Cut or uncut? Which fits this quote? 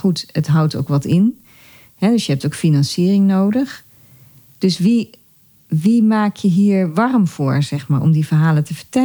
uncut